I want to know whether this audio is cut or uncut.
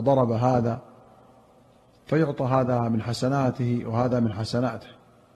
uncut